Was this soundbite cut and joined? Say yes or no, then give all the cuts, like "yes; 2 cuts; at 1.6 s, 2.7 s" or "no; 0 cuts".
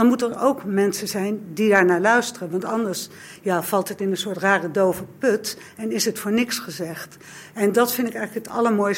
no; 0 cuts